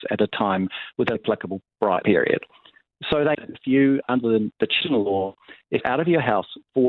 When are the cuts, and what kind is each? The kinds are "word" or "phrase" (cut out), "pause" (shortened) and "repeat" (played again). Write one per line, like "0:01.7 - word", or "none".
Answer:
0:01.1 - word
0:02.0 - word
0:03.3 - word
0:04.0 - word
0:04.8 - word
0:05.8 - word